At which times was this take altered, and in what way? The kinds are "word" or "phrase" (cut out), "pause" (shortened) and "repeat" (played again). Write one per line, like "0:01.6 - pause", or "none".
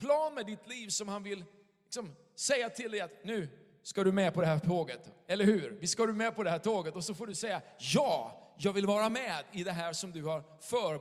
none